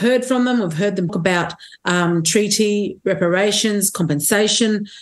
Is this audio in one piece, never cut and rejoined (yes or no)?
no